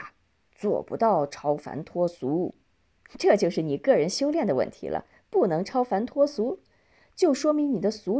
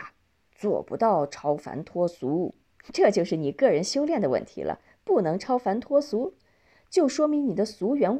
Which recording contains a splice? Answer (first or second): second